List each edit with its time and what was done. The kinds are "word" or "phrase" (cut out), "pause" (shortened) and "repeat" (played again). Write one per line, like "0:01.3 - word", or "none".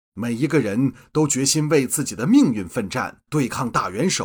0:03.3 - pause